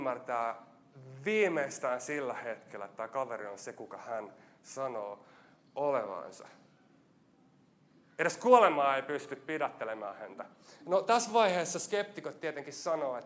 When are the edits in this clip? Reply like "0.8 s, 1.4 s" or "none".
none